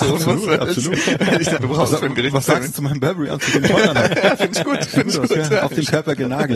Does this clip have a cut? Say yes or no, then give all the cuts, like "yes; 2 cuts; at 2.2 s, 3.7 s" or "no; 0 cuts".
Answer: yes; 1 cut; at 1.6 s